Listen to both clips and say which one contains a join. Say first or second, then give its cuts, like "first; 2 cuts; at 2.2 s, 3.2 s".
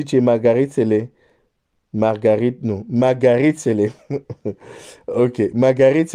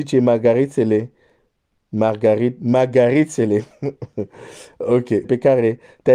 second; 2 cuts; at 2.6 s, 5.2 s